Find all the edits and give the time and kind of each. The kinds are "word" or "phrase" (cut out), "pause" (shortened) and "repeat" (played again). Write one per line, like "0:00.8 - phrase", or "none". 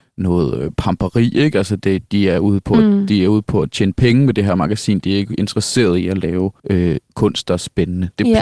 0:06.6 - pause